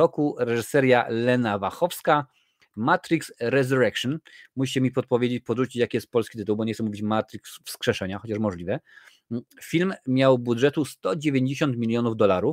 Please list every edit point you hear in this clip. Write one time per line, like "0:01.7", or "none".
none

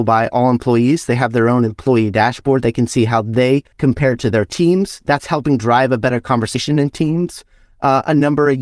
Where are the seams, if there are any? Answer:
0:03.7

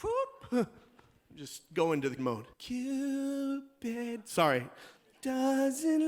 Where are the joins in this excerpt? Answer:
0:02.2
0:02.5
0:05.0

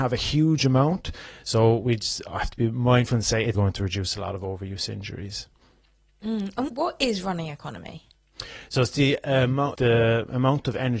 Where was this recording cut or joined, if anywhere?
0:03.5
0:06.7
0:09.7

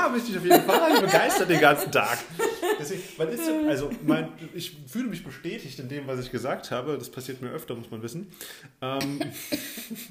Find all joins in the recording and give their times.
0:01.0

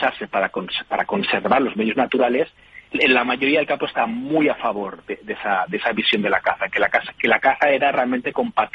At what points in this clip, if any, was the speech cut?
0:02.9

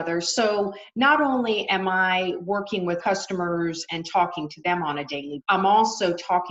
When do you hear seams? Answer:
0:03.0
0:05.4

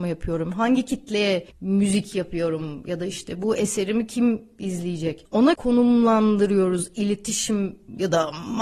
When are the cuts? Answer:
0:05.5

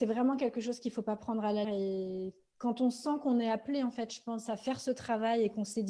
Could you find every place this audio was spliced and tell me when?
0:01.6

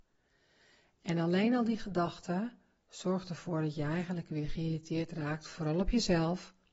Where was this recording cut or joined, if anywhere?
none

